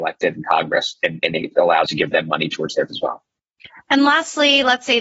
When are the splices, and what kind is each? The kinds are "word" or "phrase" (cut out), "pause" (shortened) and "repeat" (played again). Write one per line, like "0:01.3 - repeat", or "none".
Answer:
0:01.9 - word
0:02.9 - word